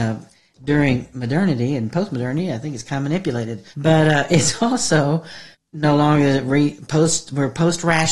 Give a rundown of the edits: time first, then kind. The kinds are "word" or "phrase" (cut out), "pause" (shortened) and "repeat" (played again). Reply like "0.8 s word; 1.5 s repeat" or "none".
3.7 s pause; 5.5 s pause